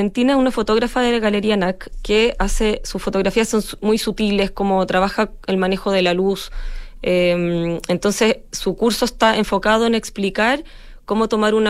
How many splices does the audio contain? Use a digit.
0